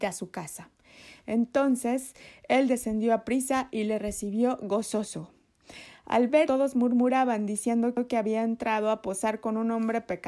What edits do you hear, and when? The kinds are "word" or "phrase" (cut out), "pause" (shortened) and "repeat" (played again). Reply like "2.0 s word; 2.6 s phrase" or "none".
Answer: 6.5 s word